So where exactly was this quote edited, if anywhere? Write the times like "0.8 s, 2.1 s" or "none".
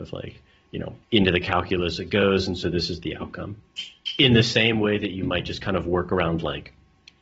1.0 s